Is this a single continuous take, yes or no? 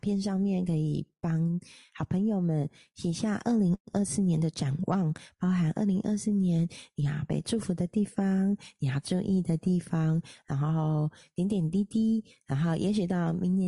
yes